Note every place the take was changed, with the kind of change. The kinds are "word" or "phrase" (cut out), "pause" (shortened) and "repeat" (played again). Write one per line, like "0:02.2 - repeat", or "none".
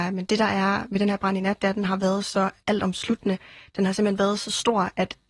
0:02.6 - pause